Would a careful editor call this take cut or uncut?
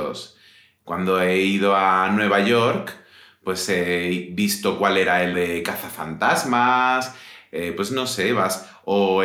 cut